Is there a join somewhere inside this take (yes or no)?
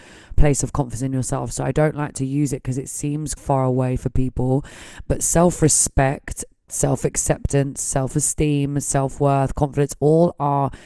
yes